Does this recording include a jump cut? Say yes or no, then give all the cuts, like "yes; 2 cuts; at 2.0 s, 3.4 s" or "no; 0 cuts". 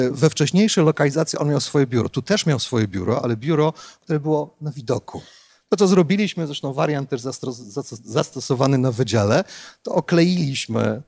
no; 0 cuts